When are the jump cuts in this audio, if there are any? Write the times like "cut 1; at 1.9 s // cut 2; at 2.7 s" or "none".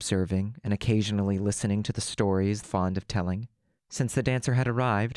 cut 1; at 2.6 s